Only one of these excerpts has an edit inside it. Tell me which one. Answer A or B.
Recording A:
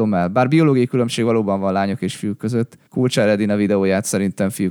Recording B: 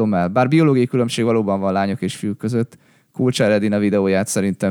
A